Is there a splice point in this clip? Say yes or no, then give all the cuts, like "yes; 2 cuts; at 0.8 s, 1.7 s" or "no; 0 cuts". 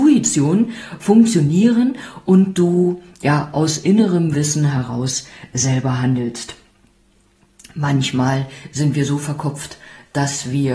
no; 0 cuts